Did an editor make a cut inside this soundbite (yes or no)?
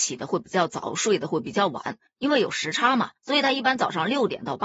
yes